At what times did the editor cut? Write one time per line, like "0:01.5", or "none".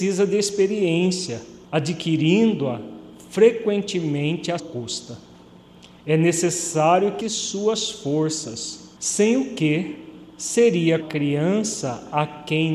0:01.6
0:04.6
0:07.2
0:09.0
0:11.0